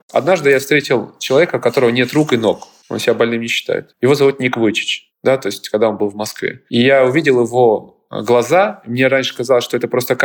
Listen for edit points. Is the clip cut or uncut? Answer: uncut